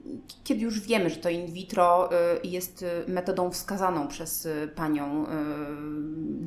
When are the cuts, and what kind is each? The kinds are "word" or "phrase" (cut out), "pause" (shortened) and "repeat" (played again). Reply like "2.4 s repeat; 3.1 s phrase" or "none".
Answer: none